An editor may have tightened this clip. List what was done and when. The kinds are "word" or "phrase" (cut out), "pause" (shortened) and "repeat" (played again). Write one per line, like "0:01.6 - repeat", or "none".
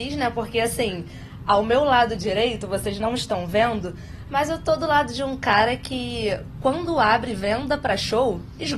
none